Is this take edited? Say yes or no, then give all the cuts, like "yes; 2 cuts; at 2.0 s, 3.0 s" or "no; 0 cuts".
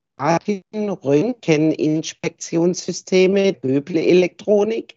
yes; 1 cut; at 3.5 s